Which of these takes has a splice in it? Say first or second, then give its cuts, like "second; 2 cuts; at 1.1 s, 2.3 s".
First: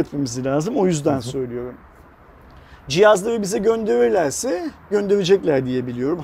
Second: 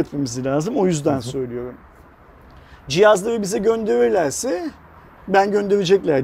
first; 1 cut; at 4.9 s